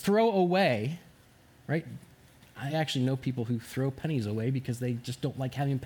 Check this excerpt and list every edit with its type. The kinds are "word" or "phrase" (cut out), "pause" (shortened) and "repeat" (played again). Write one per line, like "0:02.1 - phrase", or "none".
none